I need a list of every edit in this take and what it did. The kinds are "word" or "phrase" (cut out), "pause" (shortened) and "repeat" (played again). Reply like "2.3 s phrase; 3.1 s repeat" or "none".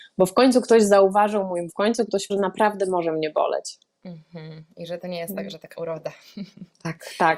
1.7 s word; 2.3 s word; 5.7 s word